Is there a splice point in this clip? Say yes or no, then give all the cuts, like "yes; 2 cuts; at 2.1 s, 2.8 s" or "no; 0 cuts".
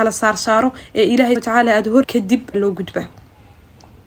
yes; 3 cuts; at 1.4 s, 2.0 s, 2.5 s